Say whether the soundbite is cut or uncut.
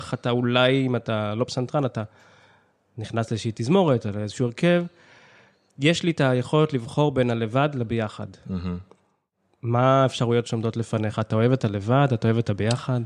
uncut